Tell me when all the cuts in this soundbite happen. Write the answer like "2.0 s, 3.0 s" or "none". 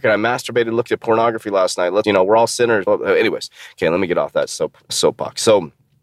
2.0 s, 2.9 s, 4.9 s